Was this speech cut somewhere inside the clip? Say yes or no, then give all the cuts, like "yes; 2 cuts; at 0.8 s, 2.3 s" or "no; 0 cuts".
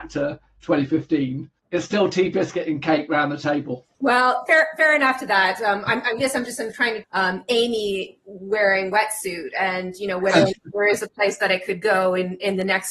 yes; 3 cuts; at 1.6 s, 3.9 s, 7.0 s